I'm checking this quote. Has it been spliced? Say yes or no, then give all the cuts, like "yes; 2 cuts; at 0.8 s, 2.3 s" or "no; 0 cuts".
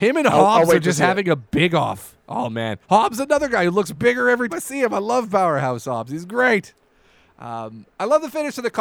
yes; 3 cuts; at 2.2 s, 2.8 s, 4.5 s